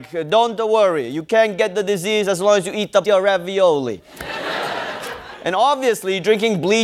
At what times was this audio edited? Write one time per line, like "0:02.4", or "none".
0:03.0